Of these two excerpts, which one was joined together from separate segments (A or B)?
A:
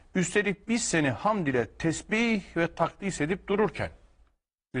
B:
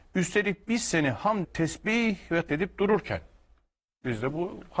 B